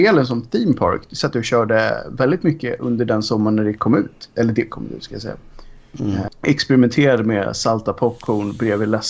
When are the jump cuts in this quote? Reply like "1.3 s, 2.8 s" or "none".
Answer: 4.7 s